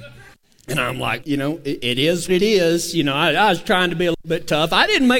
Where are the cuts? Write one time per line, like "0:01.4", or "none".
0:01.2
0:02.3